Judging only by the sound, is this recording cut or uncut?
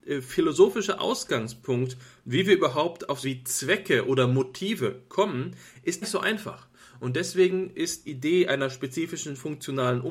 cut